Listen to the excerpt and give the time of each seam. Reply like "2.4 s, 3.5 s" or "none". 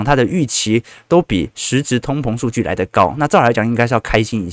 none